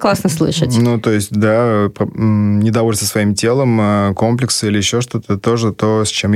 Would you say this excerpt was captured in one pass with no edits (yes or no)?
yes